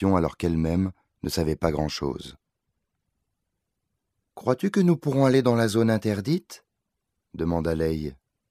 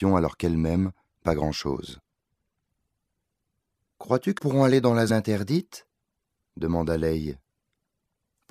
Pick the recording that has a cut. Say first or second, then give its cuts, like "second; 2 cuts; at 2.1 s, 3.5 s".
second; 3 cuts; at 1.2 s, 4.4 s, 5.1 s